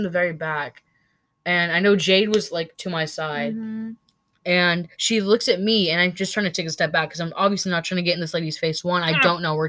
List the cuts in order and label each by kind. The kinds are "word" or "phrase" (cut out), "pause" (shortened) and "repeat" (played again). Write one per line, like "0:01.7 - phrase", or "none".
0:04.9 - pause